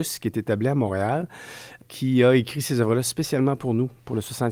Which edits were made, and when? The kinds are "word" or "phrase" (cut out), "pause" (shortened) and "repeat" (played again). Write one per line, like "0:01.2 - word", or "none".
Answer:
none